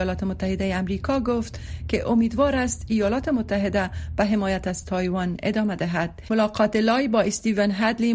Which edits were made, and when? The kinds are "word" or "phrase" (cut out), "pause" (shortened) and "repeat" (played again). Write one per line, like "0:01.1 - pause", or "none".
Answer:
0:06.3 - word